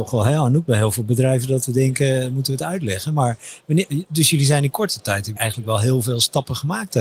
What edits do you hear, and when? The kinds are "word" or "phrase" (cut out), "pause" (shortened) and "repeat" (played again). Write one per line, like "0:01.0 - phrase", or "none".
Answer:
0:05.4 - word